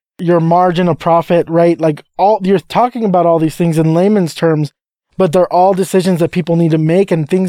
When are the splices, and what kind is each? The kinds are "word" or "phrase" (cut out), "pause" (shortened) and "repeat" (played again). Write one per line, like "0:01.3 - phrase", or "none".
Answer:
none